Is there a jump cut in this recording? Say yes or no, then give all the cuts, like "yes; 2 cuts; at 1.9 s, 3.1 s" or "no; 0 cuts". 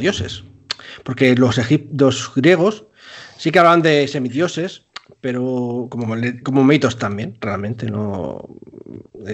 no; 0 cuts